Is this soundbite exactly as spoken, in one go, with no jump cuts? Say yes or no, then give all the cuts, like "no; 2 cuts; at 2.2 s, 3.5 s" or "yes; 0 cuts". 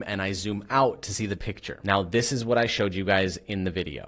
no; 1 cut; at 1.4 s